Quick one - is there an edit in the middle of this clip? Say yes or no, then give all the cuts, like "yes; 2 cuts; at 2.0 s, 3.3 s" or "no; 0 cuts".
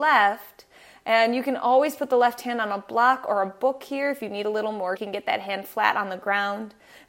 yes; 1 cut; at 5.0 s